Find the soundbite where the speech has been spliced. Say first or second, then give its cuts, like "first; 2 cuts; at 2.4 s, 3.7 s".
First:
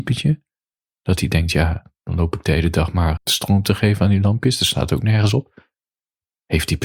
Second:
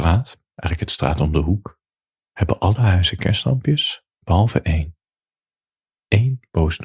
first; 1 cut; at 3.2 s